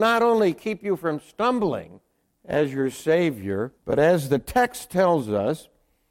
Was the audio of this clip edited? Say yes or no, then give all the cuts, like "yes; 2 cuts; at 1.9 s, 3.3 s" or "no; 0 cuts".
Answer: yes; 2 cuts; at 2.2 s, 3.8 s